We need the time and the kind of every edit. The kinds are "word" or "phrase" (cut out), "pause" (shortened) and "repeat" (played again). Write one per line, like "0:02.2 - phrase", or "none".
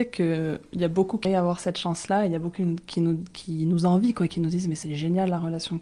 0:01.2 - word